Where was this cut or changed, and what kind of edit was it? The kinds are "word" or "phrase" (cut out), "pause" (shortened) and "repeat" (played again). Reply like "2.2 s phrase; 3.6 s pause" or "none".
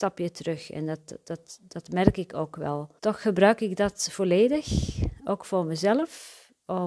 3.0 s pause